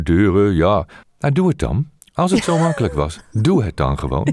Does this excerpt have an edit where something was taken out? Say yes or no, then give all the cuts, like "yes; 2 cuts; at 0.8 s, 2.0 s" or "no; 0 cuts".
yes; 2 cuts; at 1.0 s, 2.0 s